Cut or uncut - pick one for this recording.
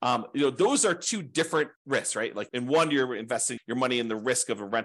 cut